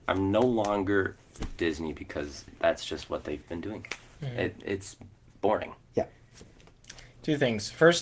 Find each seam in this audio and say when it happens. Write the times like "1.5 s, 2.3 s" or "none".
1.6 s